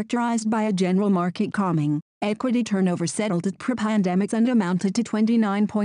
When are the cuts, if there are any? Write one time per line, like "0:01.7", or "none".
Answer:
0:04.3

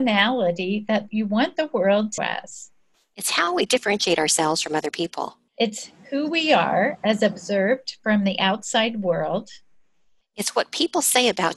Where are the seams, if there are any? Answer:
0:02.2
0:05.5

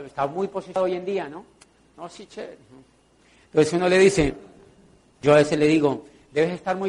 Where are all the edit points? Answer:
none

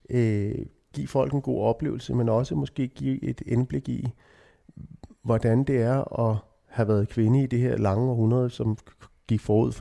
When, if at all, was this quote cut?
none

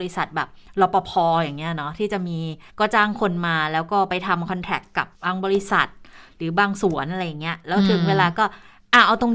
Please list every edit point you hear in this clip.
0:02.7
0:05.1

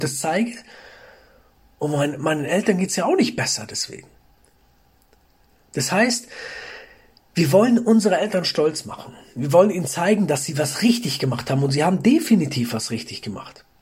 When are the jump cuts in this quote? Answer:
none

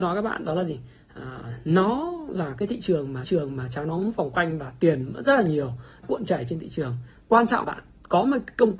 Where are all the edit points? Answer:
0:03.2
0:06.0
0:07.6

